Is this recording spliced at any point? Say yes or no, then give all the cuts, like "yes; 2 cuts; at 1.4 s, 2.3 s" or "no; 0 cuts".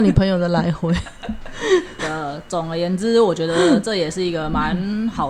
yes; 1 cut; at 2.0 s